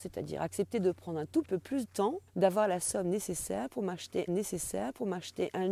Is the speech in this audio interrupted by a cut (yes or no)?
yes